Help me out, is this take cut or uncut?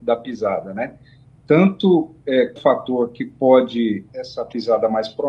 cut